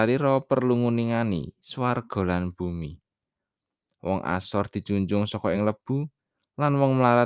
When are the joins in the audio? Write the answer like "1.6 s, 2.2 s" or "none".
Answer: none